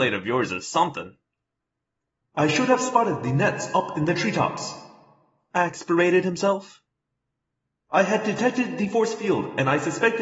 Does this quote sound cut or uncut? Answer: uncut